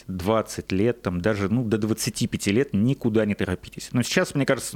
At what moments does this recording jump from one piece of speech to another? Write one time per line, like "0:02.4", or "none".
none